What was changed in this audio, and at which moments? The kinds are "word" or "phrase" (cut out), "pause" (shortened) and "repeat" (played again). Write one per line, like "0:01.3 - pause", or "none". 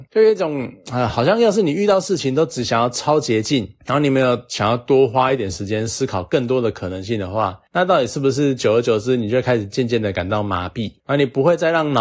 none